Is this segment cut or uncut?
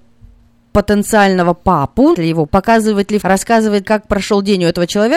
cut